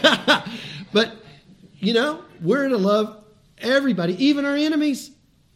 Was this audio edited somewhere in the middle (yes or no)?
no